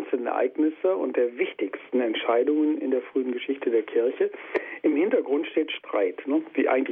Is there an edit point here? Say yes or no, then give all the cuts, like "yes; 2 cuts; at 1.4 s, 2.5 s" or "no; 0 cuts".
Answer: no; 0 cuts